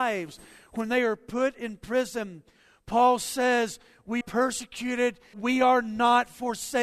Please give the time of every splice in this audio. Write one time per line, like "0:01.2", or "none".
0:04.2
0:05.3